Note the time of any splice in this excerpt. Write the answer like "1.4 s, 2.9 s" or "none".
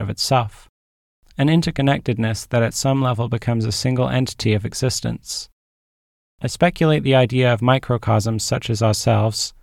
none